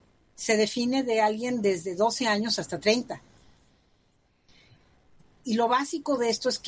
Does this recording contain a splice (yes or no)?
no